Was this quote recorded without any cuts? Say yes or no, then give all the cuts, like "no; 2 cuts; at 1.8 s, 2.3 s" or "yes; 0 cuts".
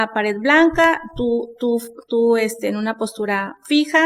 yes; 0 cuts